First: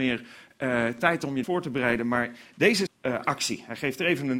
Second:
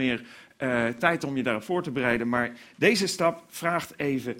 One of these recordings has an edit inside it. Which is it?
first; 2 cuts; at 1.4 s, 2.9 s

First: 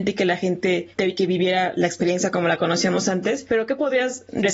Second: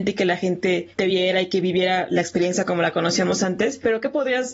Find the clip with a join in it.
first; 1 cut; at 1.1 s

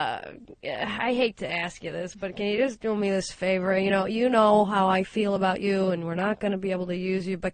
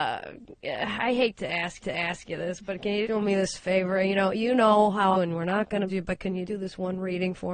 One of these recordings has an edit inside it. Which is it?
second; 5 cuts; at 1.8 s, 3.0 s, 5.1 s, 5.9 s, 6.4 s

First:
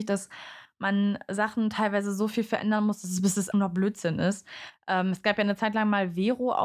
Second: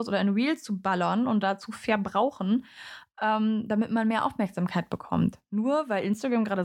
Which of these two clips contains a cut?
first; 1 cut; at 3.5 s

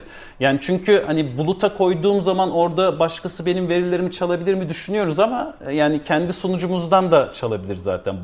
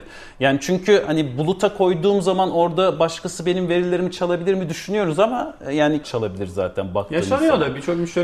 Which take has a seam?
second; 1 cut; at 6.0 s

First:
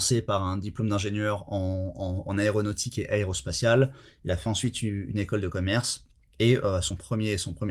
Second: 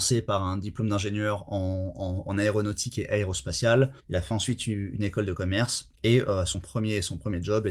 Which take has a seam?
second; 2 cuts; at 4.0 s, 5.9 s

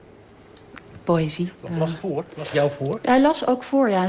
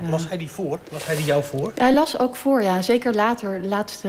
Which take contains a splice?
first; 2 cuts; at 2.0 s, 2.5 s

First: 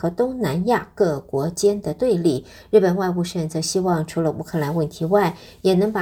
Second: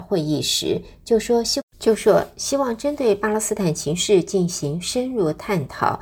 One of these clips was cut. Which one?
second; 1 cut; at 1.7 s

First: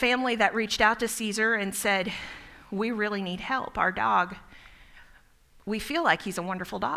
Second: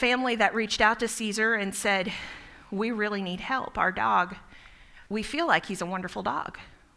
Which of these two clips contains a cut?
second; 1 cut; at 5.1 s

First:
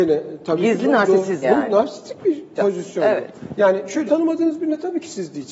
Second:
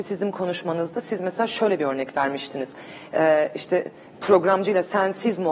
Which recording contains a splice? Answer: first; 3 cuts; at 1.4 s, 2.6 s, 4.1 s

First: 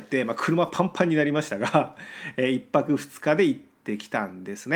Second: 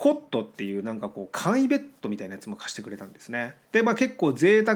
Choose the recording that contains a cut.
second; 1 cut; at 3.6 s

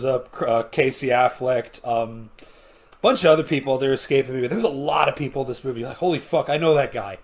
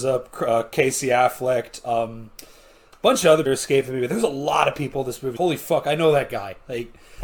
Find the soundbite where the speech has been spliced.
second; 2 cuts; at 3.5 s, 5.4 s

